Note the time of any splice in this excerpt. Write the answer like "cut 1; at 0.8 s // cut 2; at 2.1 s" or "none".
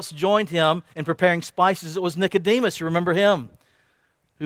cut 1; at 0.9 s